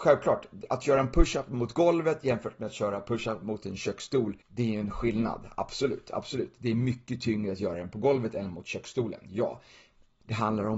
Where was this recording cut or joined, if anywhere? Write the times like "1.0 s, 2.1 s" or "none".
4.4 s